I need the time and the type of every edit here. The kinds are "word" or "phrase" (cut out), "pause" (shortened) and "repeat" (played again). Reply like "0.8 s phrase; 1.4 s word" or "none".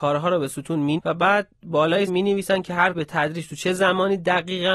1.0 s word; 2.1 s word; 2.9 s word